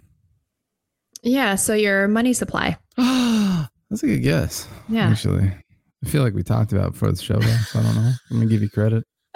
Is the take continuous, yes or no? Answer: yes